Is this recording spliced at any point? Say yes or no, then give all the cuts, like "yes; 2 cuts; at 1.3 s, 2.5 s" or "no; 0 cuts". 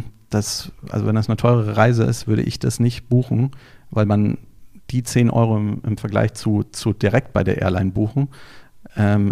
no; 0 cuts